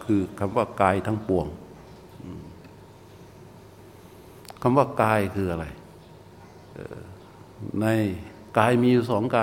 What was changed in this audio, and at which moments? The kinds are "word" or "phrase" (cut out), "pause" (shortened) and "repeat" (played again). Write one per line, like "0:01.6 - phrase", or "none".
0:08.5 - pause